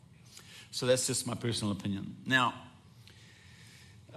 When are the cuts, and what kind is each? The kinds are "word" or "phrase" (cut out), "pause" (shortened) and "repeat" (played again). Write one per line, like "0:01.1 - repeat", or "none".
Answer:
none